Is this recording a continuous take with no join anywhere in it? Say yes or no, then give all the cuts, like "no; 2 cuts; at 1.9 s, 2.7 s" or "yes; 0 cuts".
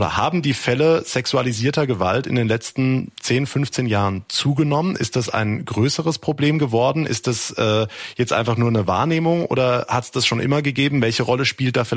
yes; 0 cuts